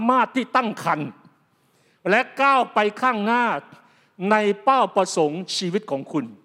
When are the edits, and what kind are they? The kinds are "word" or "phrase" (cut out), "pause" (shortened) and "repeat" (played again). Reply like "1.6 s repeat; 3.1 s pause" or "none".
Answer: none